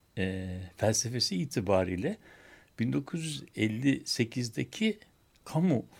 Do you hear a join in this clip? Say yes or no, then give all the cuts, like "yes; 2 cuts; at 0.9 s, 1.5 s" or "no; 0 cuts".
no; 0 cuts